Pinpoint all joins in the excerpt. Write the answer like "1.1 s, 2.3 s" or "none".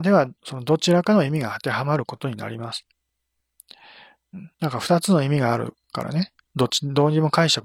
4.5 s

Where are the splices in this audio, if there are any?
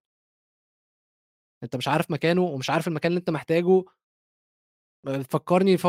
none

